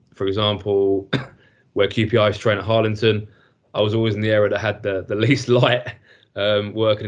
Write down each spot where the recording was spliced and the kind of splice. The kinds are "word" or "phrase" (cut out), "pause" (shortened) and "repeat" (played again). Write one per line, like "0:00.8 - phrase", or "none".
none